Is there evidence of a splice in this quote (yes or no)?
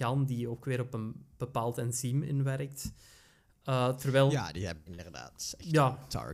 no